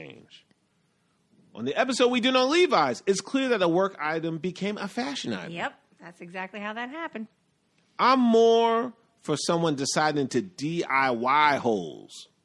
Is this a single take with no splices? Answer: yes; 0 cuts

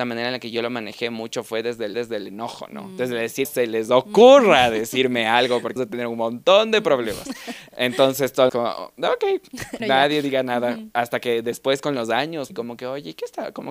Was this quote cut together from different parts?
yes; 6 cuts; at 1.9 s, 3.4 s, 5.8 s, 8.5 s, 9.8 s, 12.5 s

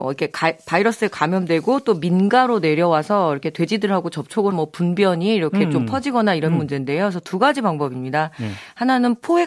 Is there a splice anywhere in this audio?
yes; 1 cut; at 4.5 s

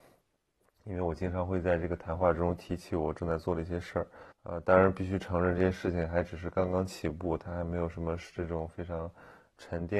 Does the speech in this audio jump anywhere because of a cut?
yes; 1 cut; at 4.3 s

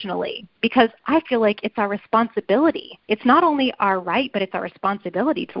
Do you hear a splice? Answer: yes; 1 cut; at 3.0 s

